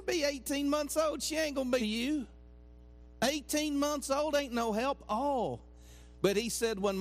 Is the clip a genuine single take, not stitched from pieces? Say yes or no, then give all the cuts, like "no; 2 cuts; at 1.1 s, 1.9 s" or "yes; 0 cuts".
no; 1 cut; at 1.8 s